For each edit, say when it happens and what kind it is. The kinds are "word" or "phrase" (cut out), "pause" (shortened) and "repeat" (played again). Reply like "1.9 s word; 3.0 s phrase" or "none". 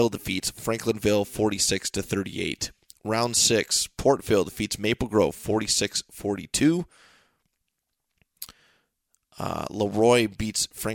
none